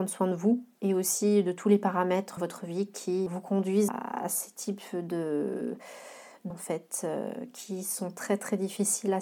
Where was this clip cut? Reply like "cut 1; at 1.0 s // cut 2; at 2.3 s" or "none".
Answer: cut 1; at 2.4 s // cut 2; at 3.3 s // cut 3; at 3.9 s // cut 4; at 6.5 s